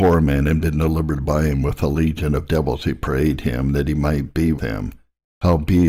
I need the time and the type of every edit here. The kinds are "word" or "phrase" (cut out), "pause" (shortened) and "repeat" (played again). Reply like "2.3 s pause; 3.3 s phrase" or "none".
4.6 s word